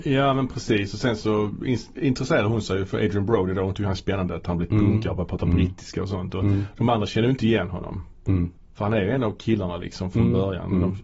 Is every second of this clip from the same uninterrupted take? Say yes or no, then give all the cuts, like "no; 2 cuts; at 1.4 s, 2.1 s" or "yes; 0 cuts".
yes; 0 cuts